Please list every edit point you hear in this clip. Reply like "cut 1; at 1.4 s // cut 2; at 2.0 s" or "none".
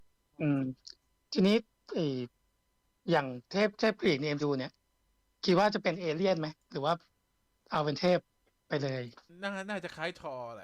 cut 1; at 4.4 s